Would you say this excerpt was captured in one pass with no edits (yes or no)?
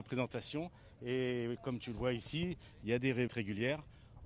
no